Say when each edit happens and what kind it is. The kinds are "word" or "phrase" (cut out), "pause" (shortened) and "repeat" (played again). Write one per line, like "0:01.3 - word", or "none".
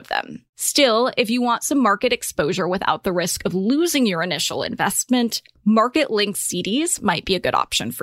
none